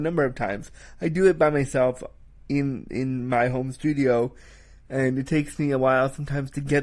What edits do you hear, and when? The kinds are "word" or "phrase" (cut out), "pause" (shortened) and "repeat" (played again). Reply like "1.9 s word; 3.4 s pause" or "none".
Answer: none